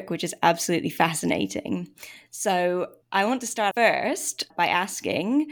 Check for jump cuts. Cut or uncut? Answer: cut